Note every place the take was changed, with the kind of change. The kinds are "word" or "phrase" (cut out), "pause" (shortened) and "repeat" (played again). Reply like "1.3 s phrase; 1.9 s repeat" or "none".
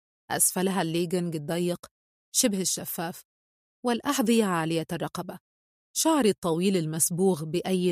none